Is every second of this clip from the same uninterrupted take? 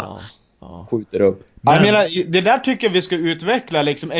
yes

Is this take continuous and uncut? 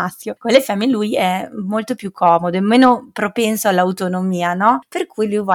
yes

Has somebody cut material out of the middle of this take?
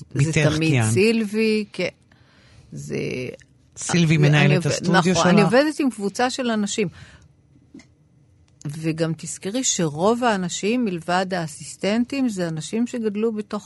no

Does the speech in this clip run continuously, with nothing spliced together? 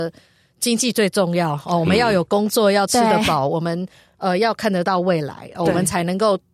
yes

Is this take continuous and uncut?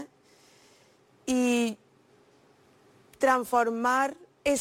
yes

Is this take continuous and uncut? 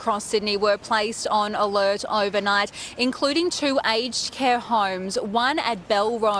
yes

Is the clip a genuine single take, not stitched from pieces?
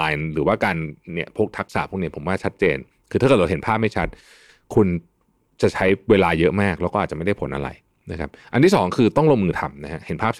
yes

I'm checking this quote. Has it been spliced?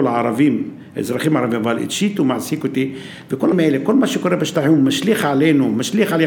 yes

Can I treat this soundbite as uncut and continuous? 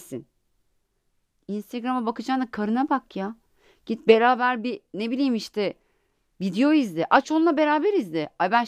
yes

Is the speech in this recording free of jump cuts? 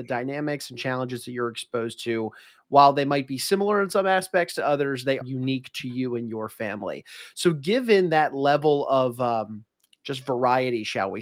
no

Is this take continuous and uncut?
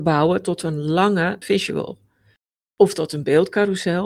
no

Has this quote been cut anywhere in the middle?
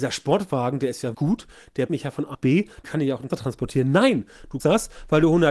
yes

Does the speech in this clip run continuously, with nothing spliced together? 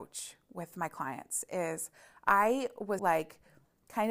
no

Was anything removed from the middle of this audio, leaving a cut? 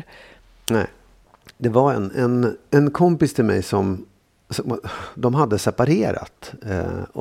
no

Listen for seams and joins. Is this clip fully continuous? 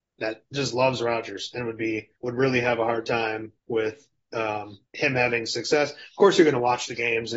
no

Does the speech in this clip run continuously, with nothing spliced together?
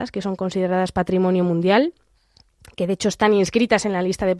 yes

